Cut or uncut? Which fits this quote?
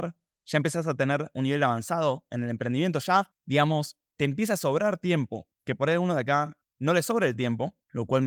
uncut